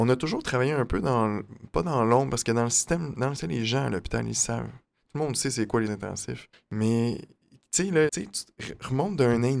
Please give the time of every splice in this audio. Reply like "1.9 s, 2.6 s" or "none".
3.4 s, 5.9 s, 6.5 s, 8.1 s